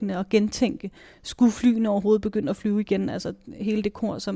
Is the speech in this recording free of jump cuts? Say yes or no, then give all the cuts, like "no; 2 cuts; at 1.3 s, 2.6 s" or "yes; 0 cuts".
yes; 0 cuts